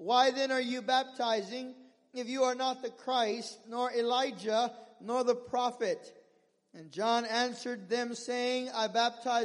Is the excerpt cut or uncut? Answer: uncut